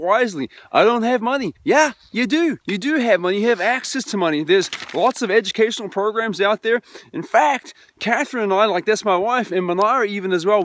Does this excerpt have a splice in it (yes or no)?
yes